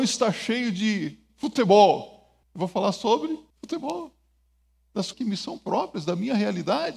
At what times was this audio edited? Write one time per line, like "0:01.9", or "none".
0:02.4
0:03.5
0:05.1